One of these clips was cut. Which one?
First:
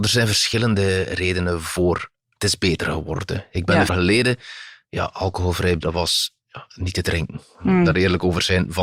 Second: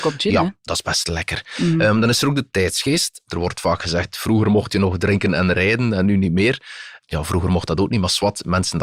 first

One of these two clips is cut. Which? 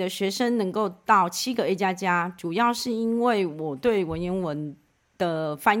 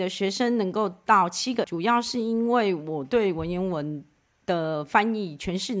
second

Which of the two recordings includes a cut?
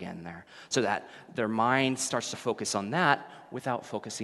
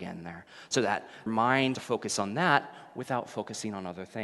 second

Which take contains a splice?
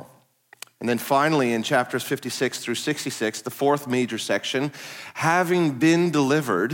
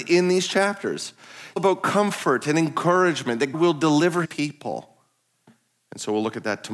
second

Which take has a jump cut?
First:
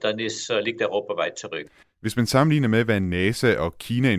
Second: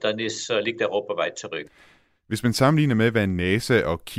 first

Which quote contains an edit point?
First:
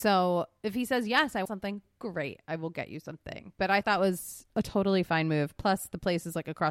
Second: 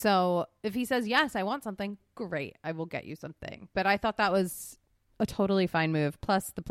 first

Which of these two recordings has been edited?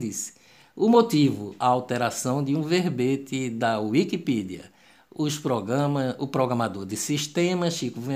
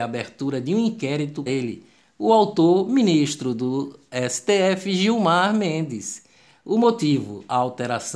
second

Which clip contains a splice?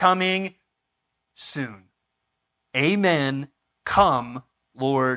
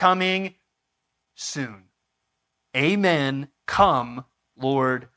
second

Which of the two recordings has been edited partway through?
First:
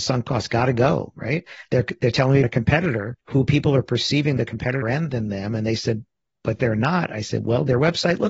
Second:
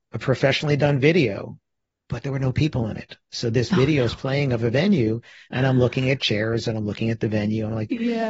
first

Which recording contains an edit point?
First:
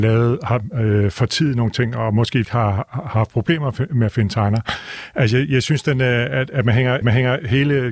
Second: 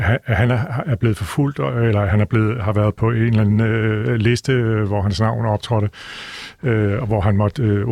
first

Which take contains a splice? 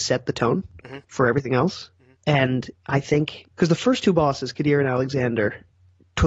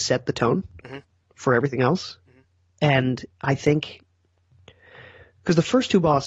first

